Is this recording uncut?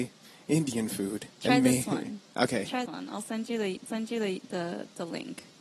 no; 3 cuts; at 1.3 s, 2.9 s, 3.9 s

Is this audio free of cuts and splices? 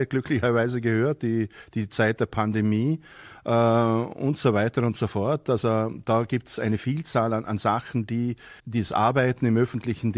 no; 1 cut; at 8.6 s

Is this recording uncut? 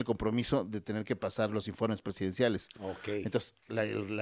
yes; 0 cuts

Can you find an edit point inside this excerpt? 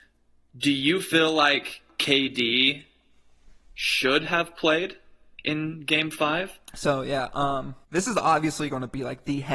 yes; 1 cut; at 7.8 s

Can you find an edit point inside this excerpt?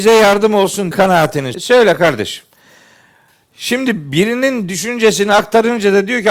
yes; 2 cuts; at 0.9 s, 1.5 s

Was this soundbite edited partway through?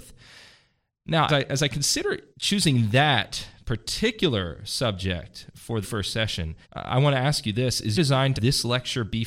yes; 6 cuts; at 1.3 s, 2.3 s, 5.8 s, 6.6 s, 7.9 s, 8.4 s

